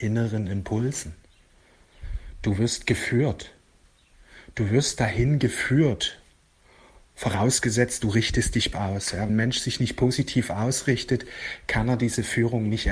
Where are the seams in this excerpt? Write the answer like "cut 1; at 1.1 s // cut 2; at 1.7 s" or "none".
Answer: cut 1; at 8.7 s // cut 2; at 9.3 s

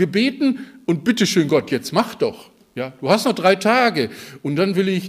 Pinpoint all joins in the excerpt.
none

